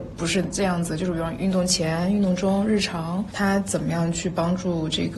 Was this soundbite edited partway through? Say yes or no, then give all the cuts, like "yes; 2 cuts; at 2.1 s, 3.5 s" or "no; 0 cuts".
yes; 1 cut; at 3.3 s